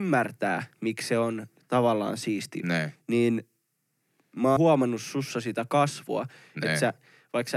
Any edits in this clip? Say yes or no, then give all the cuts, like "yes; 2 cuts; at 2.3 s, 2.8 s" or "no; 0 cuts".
yes; 2 cuts; at 2.6 s, 4.6 s